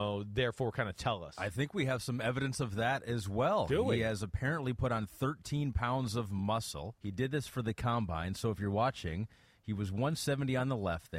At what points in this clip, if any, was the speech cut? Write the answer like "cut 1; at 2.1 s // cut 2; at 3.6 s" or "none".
cut 1; at 7.0 s